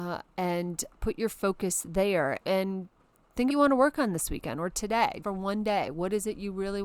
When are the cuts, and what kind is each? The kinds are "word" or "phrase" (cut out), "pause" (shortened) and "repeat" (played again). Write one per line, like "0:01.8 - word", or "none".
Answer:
0:02.4 - word
0:03.5 - phrase
0:05.2 - word